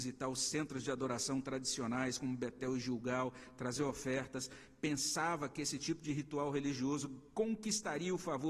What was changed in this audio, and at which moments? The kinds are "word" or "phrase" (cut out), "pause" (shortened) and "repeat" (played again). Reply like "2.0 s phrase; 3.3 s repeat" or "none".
none